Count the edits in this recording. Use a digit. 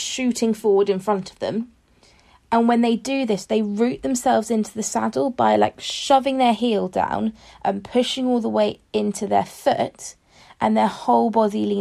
0